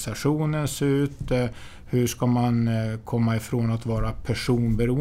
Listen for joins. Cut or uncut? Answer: uncut